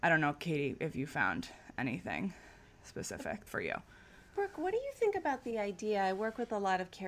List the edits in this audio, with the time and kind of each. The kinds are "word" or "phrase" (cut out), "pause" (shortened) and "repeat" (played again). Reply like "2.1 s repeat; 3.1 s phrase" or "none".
3.5 s phrase; 4.3 s pause